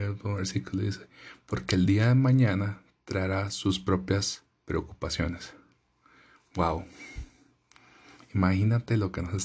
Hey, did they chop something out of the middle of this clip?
no; 0 cuts

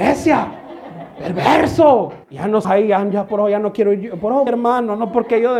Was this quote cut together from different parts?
yes; 3 cuts; at 2.2 s, 2.6 s, 4.5 s

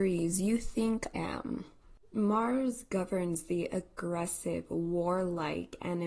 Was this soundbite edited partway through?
yes; 1 cut; at 1.1 s

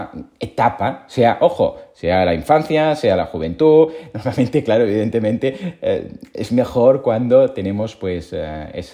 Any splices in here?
no; 0 cuts

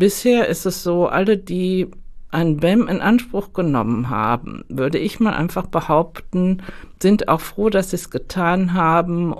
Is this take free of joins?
yes; 0 cuts

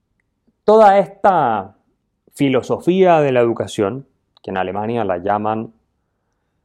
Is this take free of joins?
yes; 0 cuts

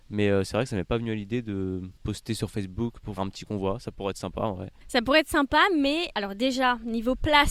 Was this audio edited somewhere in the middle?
yes; 2 cuts; at 3.2 s, 6.1 s

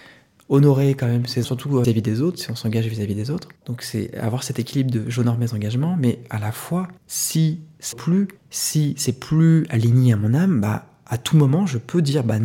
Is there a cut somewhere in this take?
yes; 6 cuts; at 1.4 s, 1.8 s, 3.6 s, 7.0 s, 7.9 s, 8.4 s

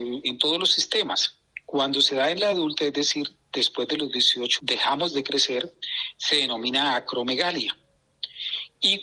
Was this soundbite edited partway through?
yes; 2 cuts; at 2.5 s, 4.6 s

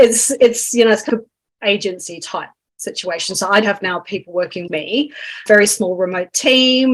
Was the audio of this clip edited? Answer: yes; 5 cuts; at 1.1 s, 1.4 s, 3.6 s, 4.7 s, 5.5 s

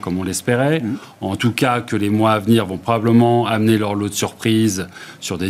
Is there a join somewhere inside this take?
no; 0 cuts

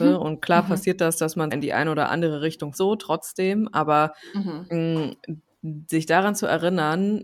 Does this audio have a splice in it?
yes; 2 cuts; at 1.5 s, 2.7 s

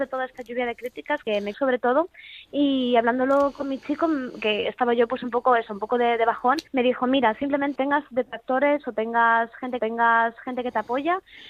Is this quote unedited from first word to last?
no; 5 cuts; at 1.2 s, 1.5 s, 6.7 s, 7.8 s, 9.8 s

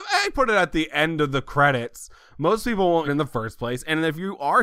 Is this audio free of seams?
no; 1 cut; at 3.0 s

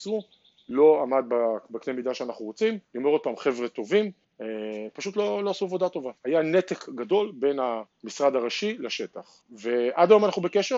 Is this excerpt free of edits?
no; 5 cuts; at 2.8 s, 4.2 s, 6.2 s, 7.9 s, 9.4 s

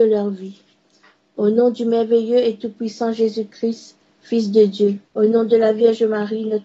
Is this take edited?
yes; 1 cut; at 5.1 s

